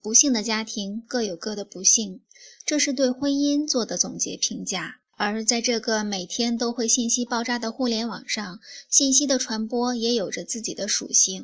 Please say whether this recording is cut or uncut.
cut